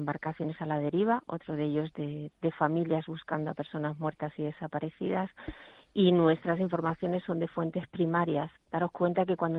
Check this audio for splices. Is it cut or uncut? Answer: uncut